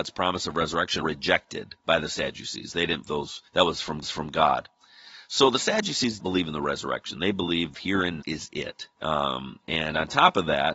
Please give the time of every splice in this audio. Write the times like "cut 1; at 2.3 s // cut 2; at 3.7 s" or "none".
cut 1; at 1.0 s // cut 2; at 1.8 s // cut 3; at 3.0 s // cut 4; at 3.5 s // cut 5; at 4.0 s // cut 6; at 6.2 s // cut 7; at 7.7 s // cut 8; at 8.2 s // cut 9; at 8.9 s